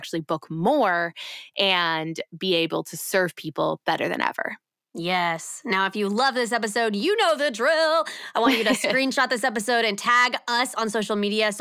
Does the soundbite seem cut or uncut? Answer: uncut